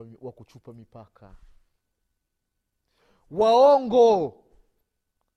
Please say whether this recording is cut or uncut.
uncut